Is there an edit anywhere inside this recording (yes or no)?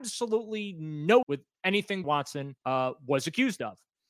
yes